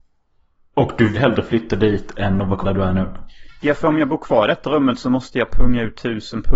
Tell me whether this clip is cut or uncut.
cut